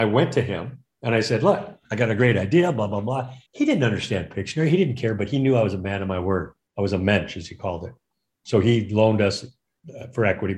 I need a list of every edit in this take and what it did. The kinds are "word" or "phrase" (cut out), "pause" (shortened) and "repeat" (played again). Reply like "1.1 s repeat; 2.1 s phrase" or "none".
3.5 s pause

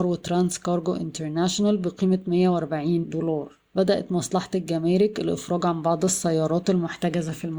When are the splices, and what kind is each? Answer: 3.0 s word; 3.7 s pause

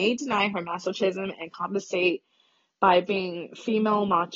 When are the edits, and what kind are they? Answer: none

